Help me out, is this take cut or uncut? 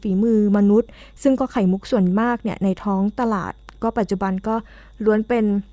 uncut